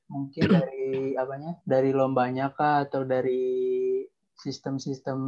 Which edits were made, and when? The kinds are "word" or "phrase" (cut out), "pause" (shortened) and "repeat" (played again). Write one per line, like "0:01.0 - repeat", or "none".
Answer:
0:01.6 - pause

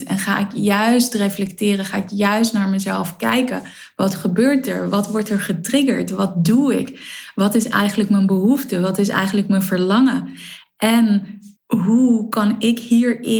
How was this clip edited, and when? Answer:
0:11.6 - pause

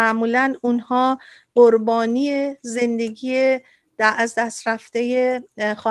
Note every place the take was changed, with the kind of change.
none

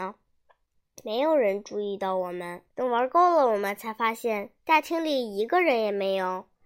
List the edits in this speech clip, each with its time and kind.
0:02.7 - pause
0:04.6 - pause

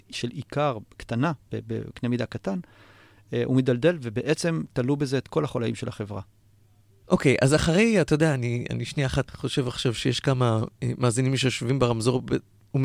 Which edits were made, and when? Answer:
0:09.3 - word

